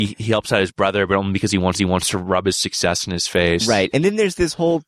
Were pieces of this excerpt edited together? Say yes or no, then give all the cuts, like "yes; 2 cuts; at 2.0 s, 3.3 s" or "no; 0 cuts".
yes; 1 cut; at 1.7 s